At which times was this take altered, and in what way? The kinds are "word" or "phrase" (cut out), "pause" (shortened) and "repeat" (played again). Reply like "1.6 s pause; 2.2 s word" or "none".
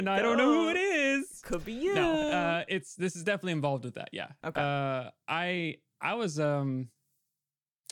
none